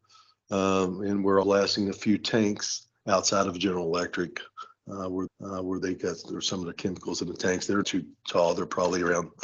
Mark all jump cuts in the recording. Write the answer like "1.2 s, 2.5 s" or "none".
1.4 s, 5.3 s, 7.8 s